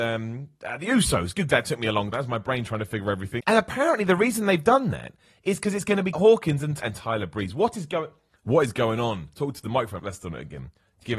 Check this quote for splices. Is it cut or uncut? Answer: cut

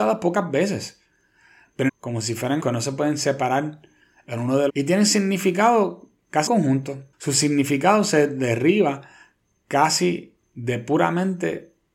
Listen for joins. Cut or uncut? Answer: cut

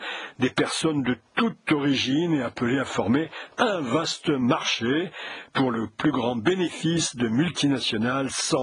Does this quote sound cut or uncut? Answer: uncut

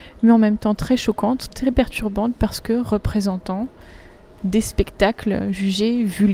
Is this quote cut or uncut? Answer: uncut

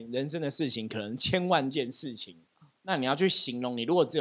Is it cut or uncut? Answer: uncut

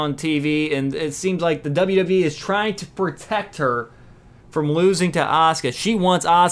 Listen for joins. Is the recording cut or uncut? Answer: uncut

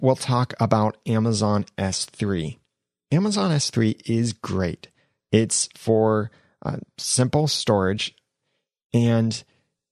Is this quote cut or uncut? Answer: uncut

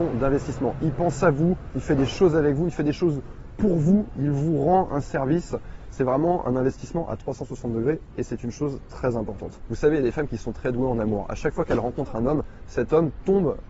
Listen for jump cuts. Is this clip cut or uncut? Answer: uncut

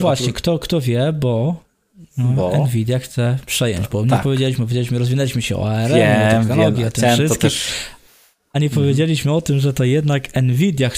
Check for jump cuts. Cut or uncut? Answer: uncut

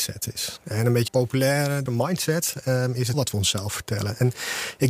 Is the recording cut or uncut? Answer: cut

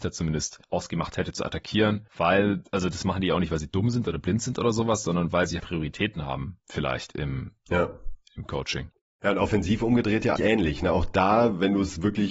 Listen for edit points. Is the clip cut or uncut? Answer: cut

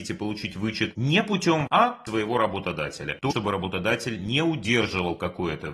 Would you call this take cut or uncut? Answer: cut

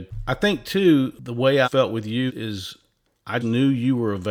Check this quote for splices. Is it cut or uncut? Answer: cut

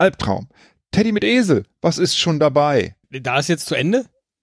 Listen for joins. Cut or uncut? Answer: cut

